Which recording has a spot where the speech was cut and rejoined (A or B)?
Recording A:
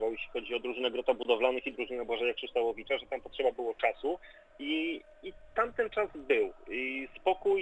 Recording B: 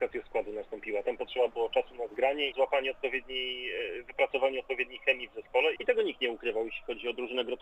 B